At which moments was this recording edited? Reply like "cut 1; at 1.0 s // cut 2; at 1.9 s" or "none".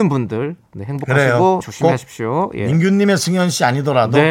cut 1; at 1.6 s